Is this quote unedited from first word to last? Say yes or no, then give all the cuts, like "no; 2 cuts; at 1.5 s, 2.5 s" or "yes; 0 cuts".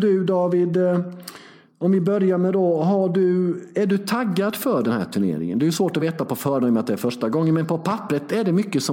yes; 0 cuts